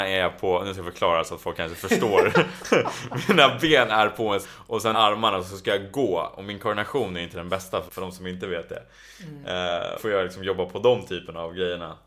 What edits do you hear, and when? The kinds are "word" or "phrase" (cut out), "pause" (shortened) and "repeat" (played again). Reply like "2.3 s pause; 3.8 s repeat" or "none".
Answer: 4.4 s word; 4.9 s word; 7.9 s word; 10.0 s phrase